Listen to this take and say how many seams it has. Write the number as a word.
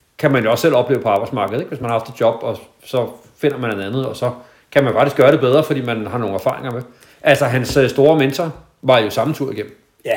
zero